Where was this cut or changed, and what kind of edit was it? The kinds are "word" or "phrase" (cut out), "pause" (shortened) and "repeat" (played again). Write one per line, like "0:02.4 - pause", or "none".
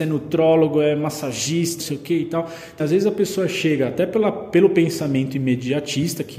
0:01.8 - word
0:02.8 - word